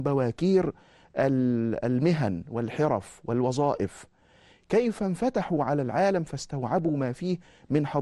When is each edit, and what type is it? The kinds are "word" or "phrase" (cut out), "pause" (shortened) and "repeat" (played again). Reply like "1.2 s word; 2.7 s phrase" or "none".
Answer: none

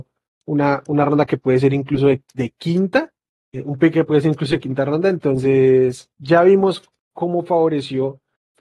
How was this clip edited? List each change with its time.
6.1 s word

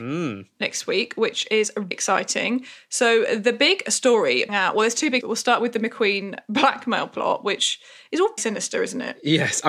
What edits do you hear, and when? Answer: 1.9 s word; 4.5 s word; 5.2 s word; 8.4 s word

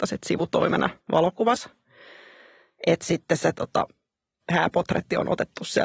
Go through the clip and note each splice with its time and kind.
1.0 s pause; 4.4 s word

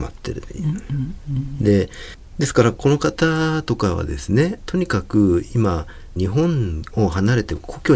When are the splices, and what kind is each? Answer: 6.2 s phrase

